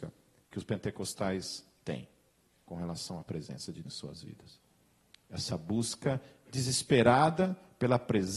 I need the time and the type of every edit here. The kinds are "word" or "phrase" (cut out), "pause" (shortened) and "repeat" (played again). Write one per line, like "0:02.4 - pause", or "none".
0:03.8 - word